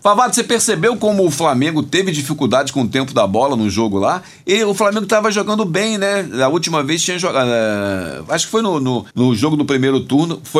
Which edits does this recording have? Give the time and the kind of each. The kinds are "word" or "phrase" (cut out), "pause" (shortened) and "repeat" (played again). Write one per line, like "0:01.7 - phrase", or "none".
0:09.1 - pause